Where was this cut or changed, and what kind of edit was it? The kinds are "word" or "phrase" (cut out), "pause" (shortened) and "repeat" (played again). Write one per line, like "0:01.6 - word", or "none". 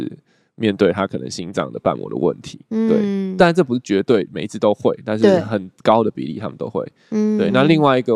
none